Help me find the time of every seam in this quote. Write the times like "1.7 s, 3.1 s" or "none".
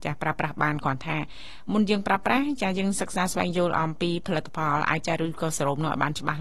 5.0 s